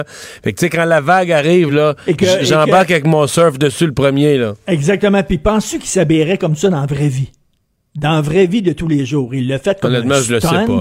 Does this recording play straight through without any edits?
yes; 0 cuts

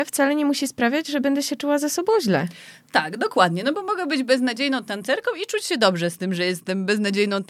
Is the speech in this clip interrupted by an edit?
no; 0 cuts

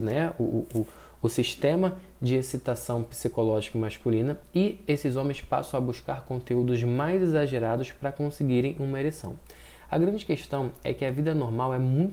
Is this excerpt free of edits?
yes; 0 cuts

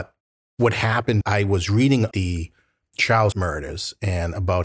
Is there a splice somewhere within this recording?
yes; 3 cuts; at 1.2 s, 2.1 s, 3.3 s

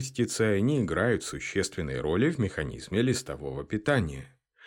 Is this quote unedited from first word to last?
yes; 0 cuts

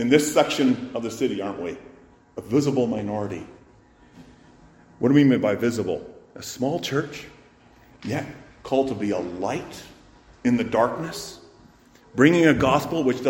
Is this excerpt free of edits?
yes; 0 cuts

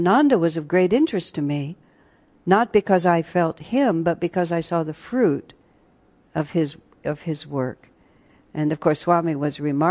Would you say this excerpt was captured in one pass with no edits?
yes; 0 cuts

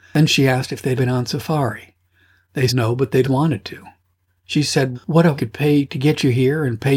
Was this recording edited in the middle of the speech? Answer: yes; 5 cuts; at 1.0 s, 2.7 s, 3.2 s, 4.9 s, 5.4 s

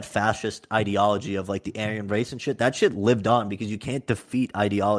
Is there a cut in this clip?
no; 0 cuts

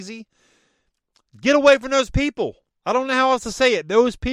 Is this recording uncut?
yes; 0 cuts

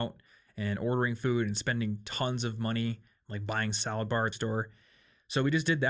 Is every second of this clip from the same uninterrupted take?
no; 1 cut; at 4.3 s

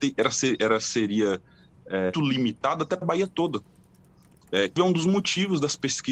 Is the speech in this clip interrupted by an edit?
yes; 3 cuts; at 2.1 s, 3.0 s, 4.8 s

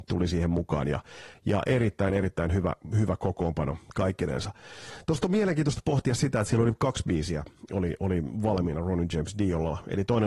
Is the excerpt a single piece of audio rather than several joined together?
yes; 0 cuts

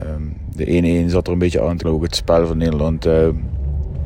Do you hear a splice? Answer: yes; 1 cut; at 1.8 s

